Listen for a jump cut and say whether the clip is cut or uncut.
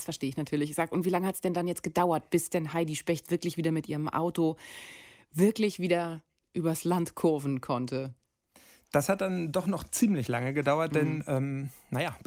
uncut